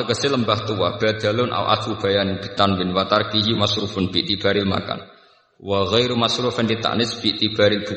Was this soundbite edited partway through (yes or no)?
no